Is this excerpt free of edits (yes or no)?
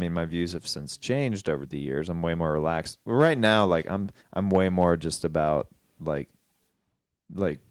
no